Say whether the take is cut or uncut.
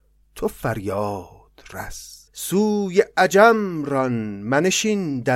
cut